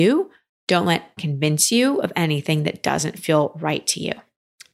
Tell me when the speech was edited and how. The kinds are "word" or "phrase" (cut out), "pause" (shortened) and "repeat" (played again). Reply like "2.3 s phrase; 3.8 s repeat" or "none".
1.2 s word